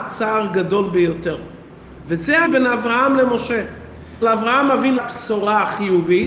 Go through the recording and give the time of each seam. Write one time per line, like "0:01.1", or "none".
0:02.5
0:04.2
0:05.0